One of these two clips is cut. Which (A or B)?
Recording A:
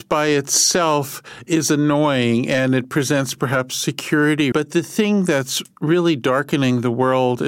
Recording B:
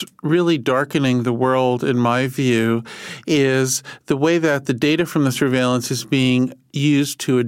A